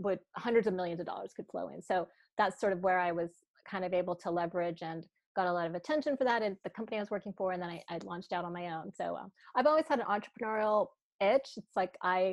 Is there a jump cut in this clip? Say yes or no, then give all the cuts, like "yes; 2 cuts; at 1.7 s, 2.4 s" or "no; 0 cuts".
no; 0 cuts